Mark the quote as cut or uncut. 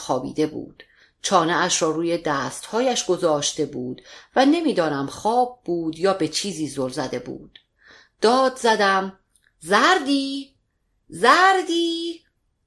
uncut